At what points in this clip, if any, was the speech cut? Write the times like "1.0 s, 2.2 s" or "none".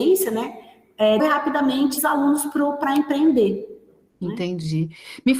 1.2 s, 2.0 s